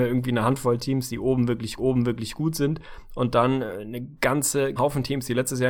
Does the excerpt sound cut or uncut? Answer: cut